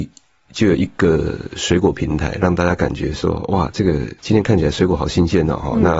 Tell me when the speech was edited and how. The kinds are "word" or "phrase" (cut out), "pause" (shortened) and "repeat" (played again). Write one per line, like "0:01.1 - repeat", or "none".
0:04.2 - pause